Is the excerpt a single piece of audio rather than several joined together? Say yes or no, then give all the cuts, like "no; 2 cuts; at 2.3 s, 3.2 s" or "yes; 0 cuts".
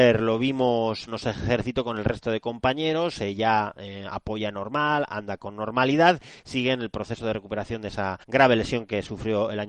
no; 2 cuts; at 1.1 s, 8.2 s